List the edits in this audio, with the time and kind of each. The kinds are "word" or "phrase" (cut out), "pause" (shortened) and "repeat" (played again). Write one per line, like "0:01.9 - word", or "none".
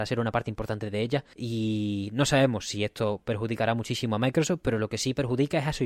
none